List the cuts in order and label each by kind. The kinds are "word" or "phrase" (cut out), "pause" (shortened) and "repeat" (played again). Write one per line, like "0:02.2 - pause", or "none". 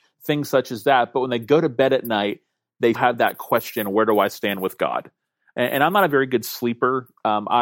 0:02.9 - word